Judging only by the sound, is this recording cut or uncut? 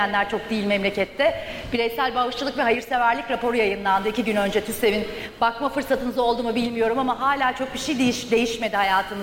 uncut